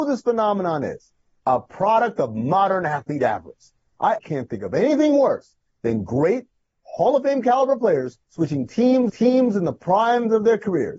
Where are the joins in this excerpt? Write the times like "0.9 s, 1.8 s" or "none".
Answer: 4.2 s, 8.2 s, 9.1 s